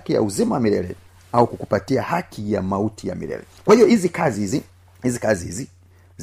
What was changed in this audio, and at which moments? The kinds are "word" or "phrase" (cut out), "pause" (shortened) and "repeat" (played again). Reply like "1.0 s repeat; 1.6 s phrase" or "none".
none